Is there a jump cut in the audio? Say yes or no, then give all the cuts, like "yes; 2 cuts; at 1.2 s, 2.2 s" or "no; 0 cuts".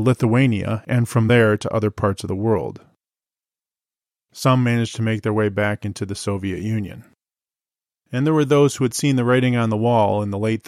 no; 0 cuts